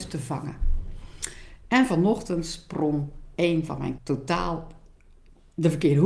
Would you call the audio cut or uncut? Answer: cut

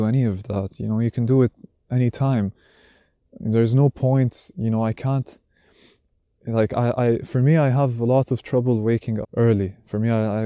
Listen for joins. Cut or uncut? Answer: cut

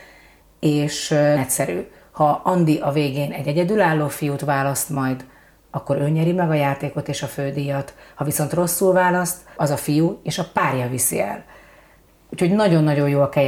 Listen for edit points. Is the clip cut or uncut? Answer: cut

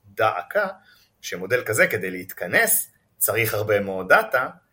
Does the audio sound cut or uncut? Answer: uncut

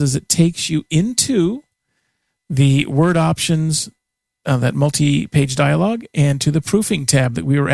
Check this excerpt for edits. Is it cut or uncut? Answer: uncut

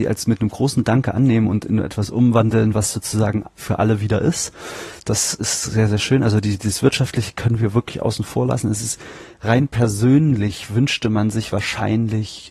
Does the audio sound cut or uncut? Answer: uncut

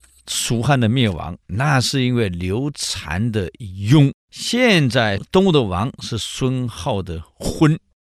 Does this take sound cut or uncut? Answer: cut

